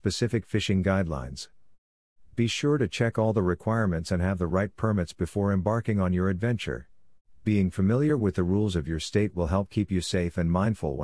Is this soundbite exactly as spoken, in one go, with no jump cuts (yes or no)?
yes